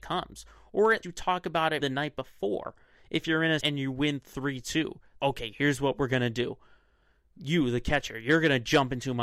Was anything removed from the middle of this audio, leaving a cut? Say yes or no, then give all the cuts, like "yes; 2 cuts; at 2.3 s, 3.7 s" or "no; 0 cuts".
yes; 4 cuts; at 1.0 s, 1.8 s, 3.6 s, 5.2 s